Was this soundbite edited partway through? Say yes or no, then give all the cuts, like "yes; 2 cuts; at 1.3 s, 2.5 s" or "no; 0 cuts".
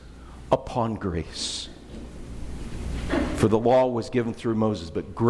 no; 0 cuts